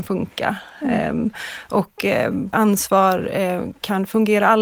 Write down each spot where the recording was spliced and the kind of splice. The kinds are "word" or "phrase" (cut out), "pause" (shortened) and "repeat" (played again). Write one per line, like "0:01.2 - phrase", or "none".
0:02.5 - word